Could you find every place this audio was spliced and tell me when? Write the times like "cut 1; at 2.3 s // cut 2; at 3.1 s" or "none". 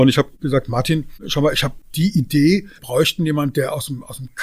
cut 1; at 2.8 s

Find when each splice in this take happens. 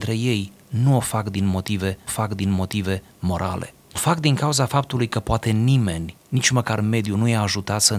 cut 1; at 2.1 s // cut 2; at 3.9 s

